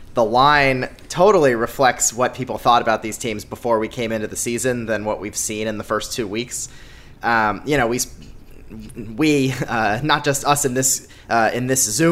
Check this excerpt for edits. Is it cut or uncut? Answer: uncut